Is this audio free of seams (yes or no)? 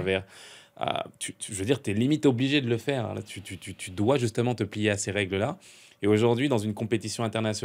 yes